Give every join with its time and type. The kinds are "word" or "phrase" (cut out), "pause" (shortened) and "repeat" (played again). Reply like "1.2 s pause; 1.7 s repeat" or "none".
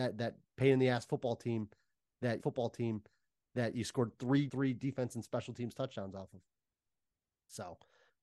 2.4 s repeat; 4.5 s phrase